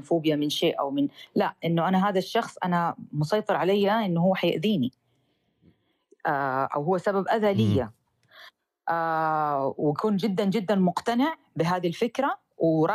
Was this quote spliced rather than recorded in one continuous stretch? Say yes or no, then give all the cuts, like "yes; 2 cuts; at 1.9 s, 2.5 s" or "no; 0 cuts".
no; 0 cuts